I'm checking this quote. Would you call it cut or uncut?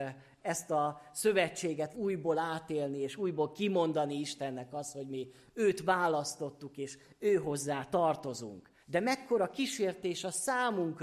cut